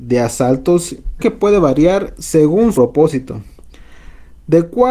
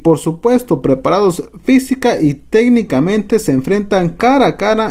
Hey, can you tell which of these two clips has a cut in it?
first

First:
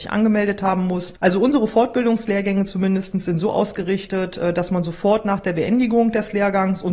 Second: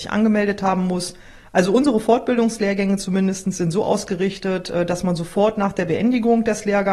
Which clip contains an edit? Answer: first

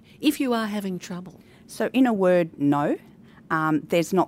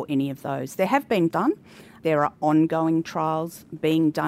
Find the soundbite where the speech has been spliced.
second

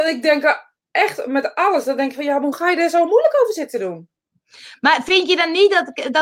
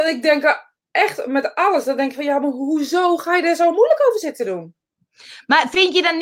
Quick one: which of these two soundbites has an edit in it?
first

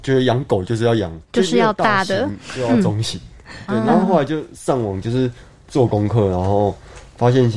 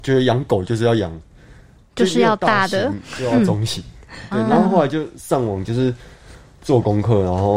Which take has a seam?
first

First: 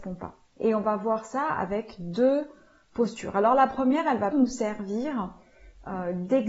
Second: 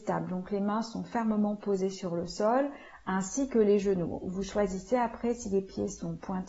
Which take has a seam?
first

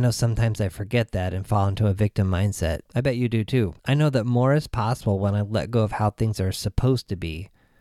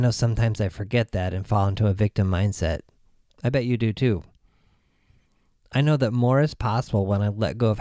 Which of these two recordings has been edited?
first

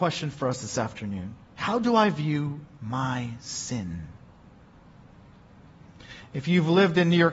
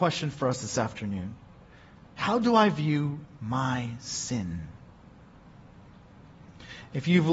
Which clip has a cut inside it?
first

